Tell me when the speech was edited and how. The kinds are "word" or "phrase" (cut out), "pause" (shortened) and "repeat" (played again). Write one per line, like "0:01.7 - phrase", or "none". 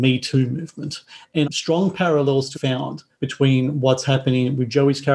0:01.4 - phrase
0:02.5 - word
0:03.1 - pause